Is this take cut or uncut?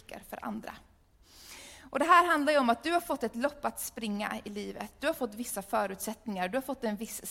uncut